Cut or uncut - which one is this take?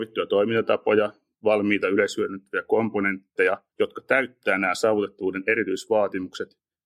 cut